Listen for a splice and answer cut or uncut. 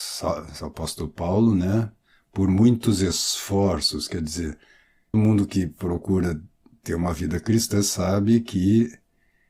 cut